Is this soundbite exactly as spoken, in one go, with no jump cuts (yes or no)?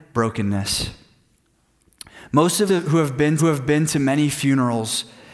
no